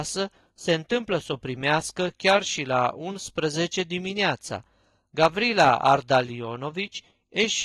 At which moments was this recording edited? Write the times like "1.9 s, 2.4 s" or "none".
none